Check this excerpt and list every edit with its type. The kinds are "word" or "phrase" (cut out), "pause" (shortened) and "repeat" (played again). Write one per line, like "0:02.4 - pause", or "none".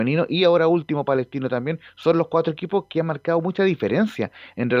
none